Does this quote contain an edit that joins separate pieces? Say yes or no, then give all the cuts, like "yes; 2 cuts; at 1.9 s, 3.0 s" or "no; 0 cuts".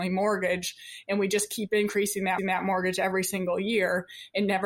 yes; 1 cut; at 2.4 s